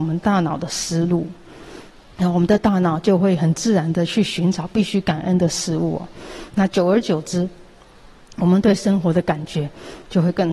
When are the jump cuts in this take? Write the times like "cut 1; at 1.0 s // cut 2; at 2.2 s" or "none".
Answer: none